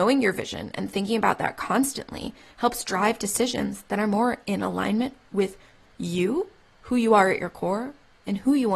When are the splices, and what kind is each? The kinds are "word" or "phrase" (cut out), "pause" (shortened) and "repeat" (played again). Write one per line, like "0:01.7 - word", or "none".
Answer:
none